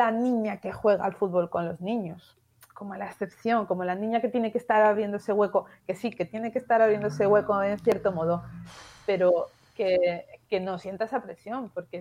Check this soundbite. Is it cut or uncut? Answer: uncut